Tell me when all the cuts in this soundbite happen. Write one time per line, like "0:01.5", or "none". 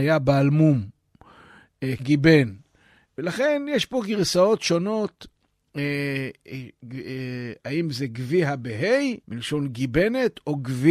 0:02.0
0:09.2

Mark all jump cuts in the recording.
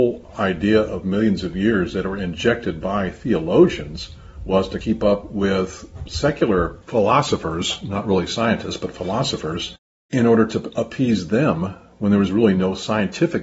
none

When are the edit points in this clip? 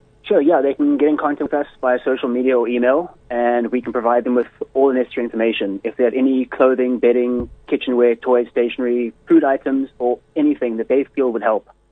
0:09.2

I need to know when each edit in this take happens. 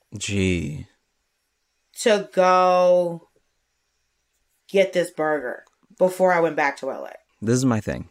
none

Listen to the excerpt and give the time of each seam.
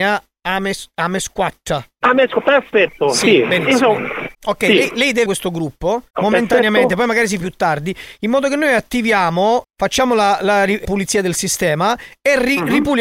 0:04.3
0:05.3
0:06.1
0:07.4
0:09.6
0:10.8

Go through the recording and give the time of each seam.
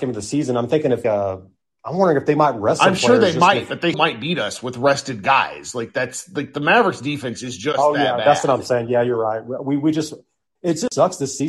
0:01.0
0:03.9

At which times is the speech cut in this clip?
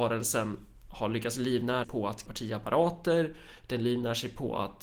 0:01.8
0:02.3

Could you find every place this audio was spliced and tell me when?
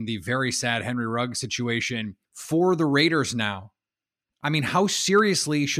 0:02.2

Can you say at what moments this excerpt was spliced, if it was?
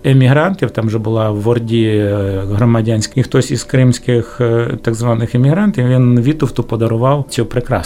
0:03.1

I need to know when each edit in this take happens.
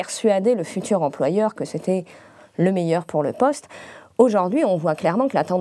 none

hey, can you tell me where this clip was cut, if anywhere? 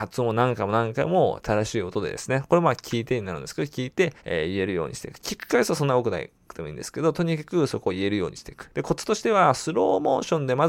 0:04.2

